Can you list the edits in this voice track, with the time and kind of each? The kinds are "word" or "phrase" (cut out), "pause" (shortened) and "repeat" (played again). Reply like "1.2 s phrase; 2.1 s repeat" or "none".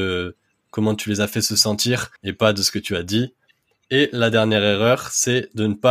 2.2 s pause